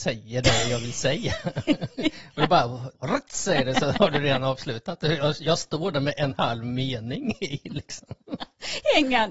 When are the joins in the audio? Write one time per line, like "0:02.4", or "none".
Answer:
0:03.0